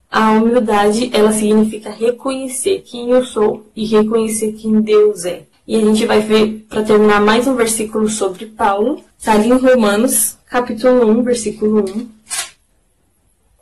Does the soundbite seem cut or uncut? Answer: cut